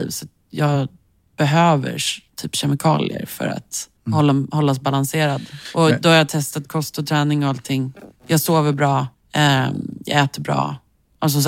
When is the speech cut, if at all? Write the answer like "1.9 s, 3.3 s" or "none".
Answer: 4.0 s, 8.2 s, 9.1 s